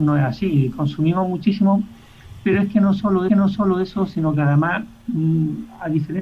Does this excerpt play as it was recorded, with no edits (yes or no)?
no